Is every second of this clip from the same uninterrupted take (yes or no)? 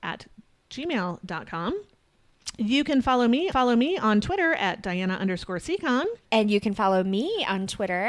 no